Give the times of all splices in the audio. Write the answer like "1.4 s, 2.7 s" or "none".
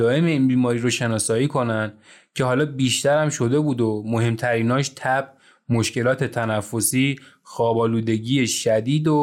none